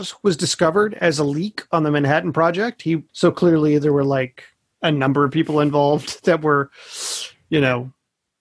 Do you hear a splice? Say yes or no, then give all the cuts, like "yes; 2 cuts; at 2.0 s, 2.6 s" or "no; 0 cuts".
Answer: yes; 1 cut; at 3.1 s